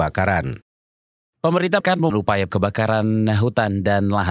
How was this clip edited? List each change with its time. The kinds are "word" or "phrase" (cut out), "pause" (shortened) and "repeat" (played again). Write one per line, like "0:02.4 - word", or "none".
0:01.8 - word
0:02.1 - word
0:02.5 - word